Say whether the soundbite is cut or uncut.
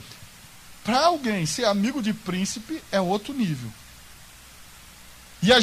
uncut